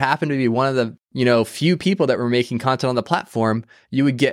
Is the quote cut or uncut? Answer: cut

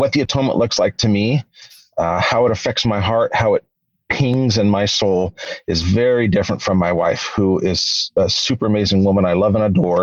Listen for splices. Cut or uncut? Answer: uncut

